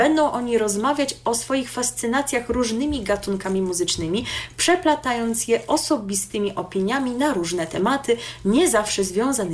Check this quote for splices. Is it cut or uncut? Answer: uncut